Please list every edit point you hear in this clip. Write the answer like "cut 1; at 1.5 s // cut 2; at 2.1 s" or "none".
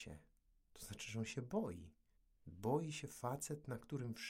cut 1; at 2.2 s